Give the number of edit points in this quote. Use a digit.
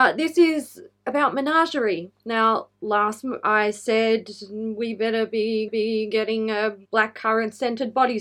3